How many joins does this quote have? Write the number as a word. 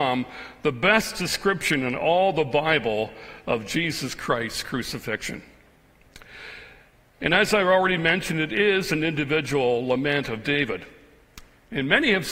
zero